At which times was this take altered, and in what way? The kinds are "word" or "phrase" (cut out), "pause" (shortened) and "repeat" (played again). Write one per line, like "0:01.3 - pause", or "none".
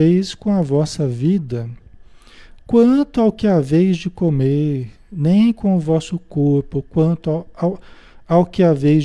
none

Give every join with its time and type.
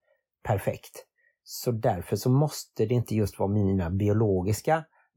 none

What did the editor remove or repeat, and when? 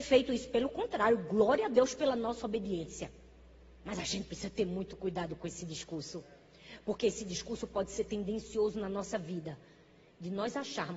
none

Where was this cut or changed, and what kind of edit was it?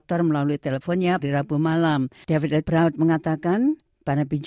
0:01.2 - word
0:02.6 - word

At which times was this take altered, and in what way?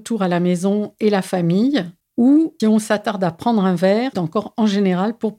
0:02.6 - word
0:04.1 - word

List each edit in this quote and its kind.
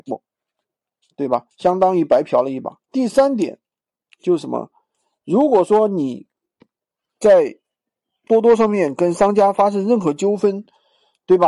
0:02.8 - pause

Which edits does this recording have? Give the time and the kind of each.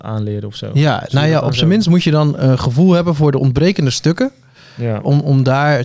none

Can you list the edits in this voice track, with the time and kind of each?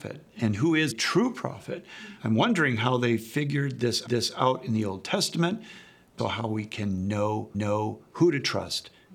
0:00.9 - word
0:02.2 - pause
0:04.1 - repeat
0:06.2 - word
0:07.5 - repeat

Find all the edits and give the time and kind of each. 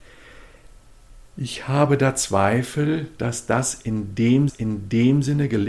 0:04.5 - repeat

